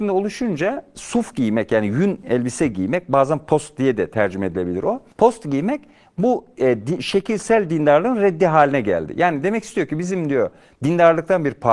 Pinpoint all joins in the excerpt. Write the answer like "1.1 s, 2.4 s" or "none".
0.9 s, 5.1 s